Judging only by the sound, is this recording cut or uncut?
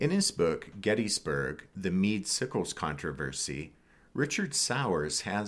uncut